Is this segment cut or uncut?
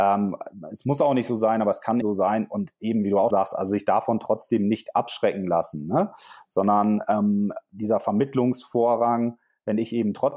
cut